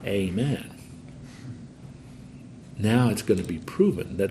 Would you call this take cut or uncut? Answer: uncut